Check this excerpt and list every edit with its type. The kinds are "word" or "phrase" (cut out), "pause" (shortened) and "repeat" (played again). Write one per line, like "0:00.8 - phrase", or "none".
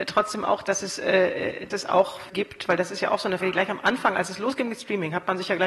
0:01.7 - word
0:02.3 - word
0:03.4 - word